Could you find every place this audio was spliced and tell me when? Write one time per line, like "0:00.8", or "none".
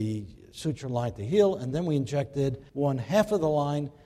0:02.7